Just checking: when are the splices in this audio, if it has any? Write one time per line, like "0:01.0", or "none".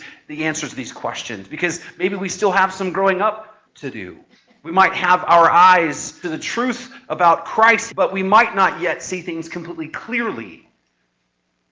0:03.7
0:04.3
0:06.2
0:07.9